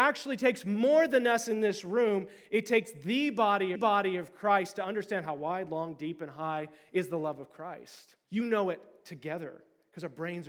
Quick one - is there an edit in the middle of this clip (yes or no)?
yes